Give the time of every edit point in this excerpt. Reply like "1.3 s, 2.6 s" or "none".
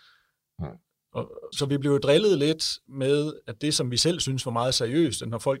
1.5 s